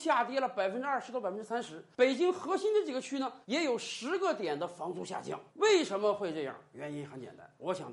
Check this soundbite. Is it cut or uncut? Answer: cut